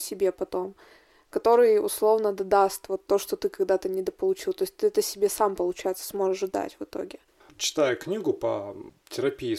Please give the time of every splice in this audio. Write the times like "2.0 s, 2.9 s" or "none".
none